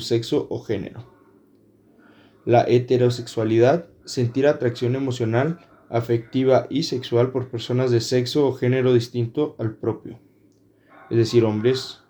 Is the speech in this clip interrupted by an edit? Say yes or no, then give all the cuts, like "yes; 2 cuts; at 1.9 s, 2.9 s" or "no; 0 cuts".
no; 0 cuts